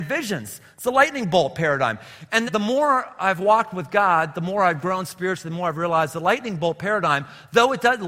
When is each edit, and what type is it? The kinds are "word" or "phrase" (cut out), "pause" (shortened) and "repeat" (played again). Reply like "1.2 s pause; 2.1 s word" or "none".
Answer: 2.5 s word

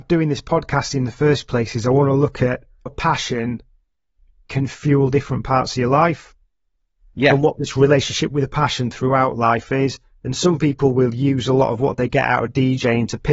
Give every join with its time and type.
2.9 s word

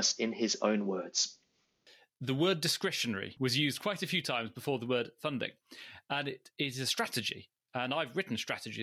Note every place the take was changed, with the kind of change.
none

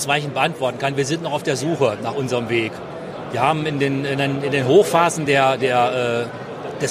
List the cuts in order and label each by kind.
none

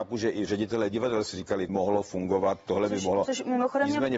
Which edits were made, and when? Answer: 1.7 s phrase

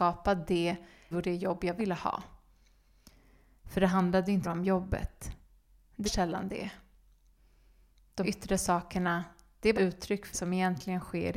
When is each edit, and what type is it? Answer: 1.1 s word; 1.8 s word; 4.4 s word; 6.0 s word; 8.2 s word; 9.7 s word; 10.3 s word

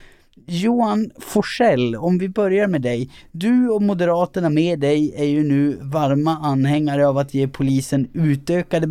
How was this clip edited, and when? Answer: none

